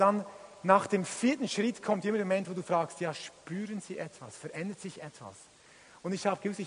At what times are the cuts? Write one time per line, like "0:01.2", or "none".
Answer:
none